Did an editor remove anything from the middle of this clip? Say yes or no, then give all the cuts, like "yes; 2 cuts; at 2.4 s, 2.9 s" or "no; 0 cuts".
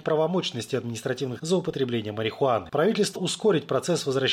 yes; 2 cuts; at 1.4 s, 3.1 s